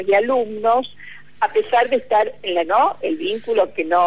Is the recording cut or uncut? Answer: cut